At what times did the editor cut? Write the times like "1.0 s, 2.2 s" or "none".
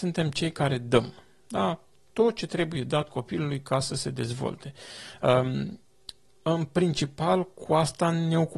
none